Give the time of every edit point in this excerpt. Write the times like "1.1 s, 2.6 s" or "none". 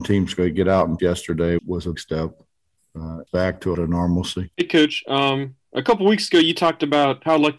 1.0 s, 1.6 s, 1.9 s, 3.3 s, 3.7 s, 4.5 s